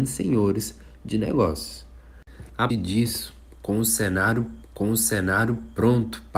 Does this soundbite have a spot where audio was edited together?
yes; 2 cuts; at 2.7 s, 4.6 s

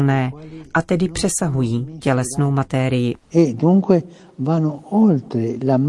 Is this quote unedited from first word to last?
yes; 0 cuts

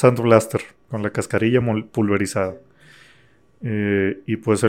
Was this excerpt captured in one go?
yes; 0 cuts

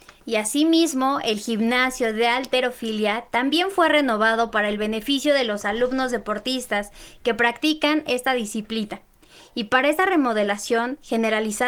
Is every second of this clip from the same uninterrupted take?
yes; 0 cuts

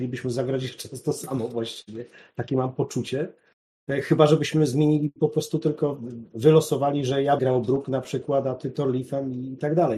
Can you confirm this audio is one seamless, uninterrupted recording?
no; 1 cut; at 7.4 s

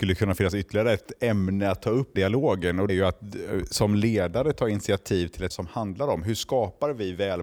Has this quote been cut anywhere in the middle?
yes; 3 cuts; at 2.2 s, 2.9 s, 5.5 s

